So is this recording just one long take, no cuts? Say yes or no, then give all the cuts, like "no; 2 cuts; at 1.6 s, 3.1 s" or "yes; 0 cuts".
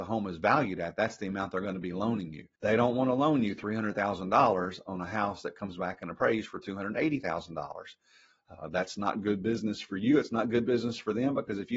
no; 1 cut; at 2.5 s